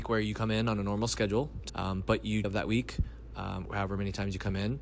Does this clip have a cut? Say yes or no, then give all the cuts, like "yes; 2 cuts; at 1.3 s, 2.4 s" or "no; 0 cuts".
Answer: yes; 3 cuts; at 1.7 s, 2.4 s, 3.7 s